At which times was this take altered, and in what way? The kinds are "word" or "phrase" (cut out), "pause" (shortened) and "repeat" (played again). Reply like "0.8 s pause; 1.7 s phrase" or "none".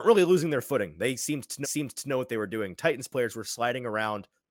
1.6 s repeat